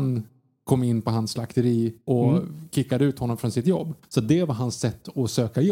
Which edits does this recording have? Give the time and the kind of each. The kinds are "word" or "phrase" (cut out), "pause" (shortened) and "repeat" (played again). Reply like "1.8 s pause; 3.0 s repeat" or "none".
2.0 s pause; 4.0 s pause